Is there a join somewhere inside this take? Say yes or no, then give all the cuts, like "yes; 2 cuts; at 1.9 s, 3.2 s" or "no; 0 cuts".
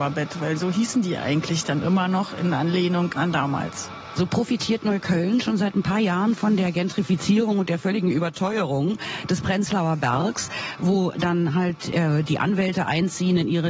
no; 0 cuts